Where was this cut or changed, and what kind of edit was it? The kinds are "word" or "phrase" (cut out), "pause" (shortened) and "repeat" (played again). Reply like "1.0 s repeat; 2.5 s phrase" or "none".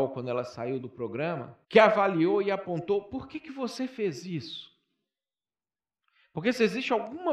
1.6 s pause